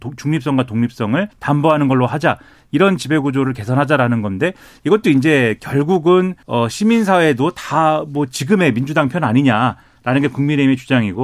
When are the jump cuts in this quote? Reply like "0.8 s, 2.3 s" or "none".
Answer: 1.3 s, 6.4 s